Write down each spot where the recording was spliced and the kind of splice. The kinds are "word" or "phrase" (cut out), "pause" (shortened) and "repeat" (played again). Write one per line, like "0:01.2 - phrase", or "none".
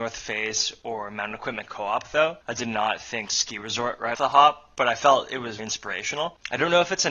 0:02.4 - pause
0:04.1 - word
0:05.6 - word